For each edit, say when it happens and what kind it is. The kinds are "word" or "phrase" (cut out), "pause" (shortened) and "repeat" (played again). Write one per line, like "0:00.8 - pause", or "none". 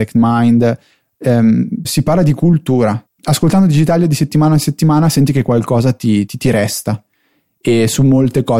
0:01.8 - word
0:03.1 - word
0:06.3 - word